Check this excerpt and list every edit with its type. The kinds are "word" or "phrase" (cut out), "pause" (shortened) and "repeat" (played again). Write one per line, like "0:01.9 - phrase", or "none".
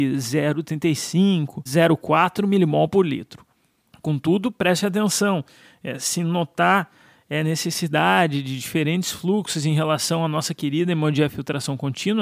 none

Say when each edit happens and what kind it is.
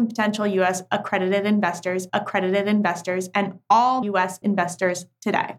0:02.1 - repeat
0:04.0 - word
0:04.4 - word

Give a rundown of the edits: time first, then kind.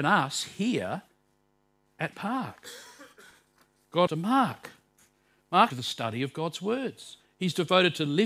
0:02.1 - word
0:04.1 - phrase
0:05.7 - phrase

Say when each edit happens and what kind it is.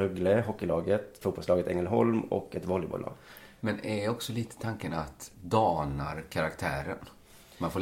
0:01.2 - word
0:05.3 - word

